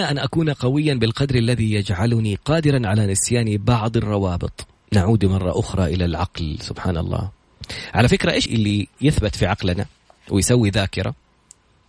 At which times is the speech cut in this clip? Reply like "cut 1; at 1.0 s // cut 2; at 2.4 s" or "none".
cut 1; at 4.8 s // cut 2; at 8.5 s